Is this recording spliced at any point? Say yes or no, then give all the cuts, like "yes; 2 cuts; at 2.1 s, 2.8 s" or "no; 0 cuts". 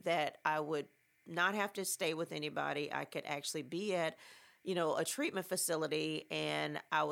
no; 0 cuts